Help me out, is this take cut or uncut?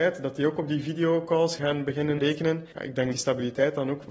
cut